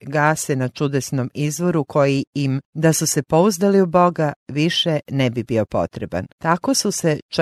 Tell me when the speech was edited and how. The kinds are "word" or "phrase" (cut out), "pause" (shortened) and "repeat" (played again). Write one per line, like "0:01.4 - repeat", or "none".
0:02.7 - pause
0:06.3 - pause